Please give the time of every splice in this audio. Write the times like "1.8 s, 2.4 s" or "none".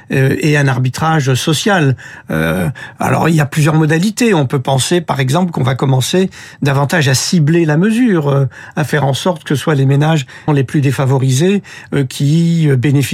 10.5 s